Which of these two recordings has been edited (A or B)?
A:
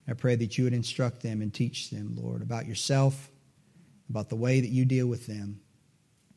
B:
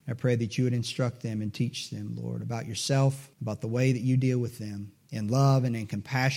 B